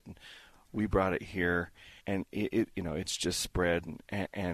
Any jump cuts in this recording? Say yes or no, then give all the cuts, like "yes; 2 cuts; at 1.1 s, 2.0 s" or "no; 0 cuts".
yes; 1 cut; at 2.0 s